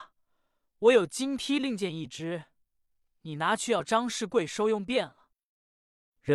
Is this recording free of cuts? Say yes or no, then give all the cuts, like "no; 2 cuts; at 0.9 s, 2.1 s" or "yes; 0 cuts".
yes; 0 cuts